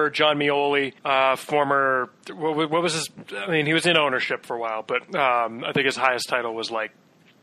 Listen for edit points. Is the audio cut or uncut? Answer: cut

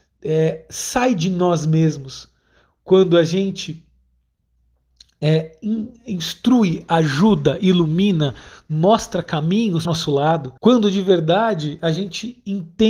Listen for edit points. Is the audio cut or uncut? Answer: cut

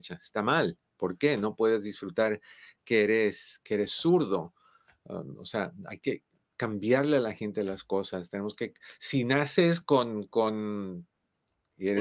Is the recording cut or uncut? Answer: uncut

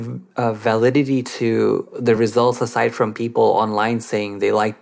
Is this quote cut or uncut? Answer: uncut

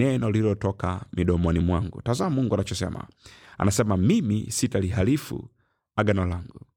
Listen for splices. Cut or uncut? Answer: uncut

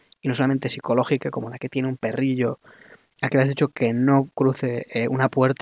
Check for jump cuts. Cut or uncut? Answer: uncut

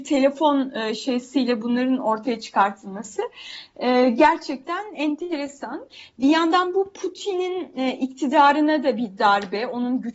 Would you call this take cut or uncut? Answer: uncut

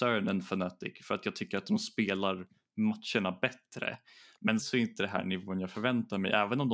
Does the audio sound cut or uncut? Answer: cut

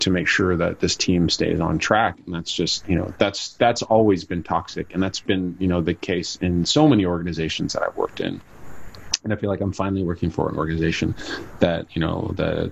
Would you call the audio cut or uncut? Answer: uncut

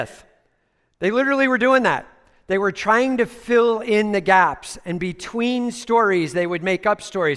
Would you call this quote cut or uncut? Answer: uncut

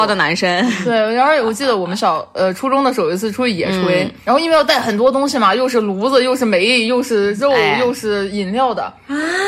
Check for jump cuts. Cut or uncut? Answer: uncut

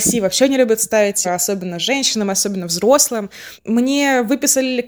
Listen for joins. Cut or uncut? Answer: cut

